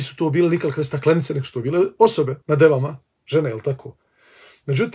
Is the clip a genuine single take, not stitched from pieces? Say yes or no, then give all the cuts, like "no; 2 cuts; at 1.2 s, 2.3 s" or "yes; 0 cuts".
no; 1 cut; at 2.4 s